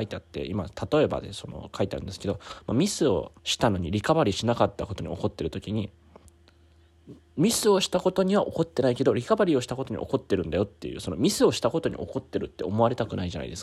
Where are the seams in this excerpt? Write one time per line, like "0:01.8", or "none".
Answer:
0:03.4